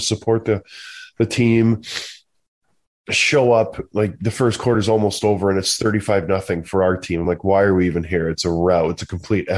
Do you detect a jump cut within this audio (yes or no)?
no